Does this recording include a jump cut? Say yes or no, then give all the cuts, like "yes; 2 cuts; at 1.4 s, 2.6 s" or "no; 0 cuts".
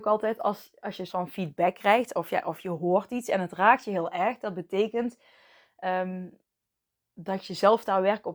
yes; 1 cut; at 1.1 s